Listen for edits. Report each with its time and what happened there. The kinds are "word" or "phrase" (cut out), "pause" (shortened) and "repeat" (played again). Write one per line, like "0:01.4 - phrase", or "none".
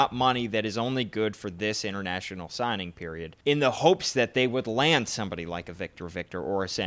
0:03.4 - pause